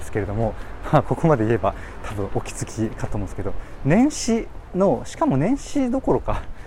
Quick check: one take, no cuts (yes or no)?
yes